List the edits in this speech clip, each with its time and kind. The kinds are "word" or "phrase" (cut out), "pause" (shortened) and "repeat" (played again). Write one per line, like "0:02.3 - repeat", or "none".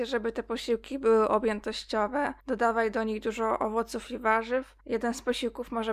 0:02.4 - pause
0:04.8 - pause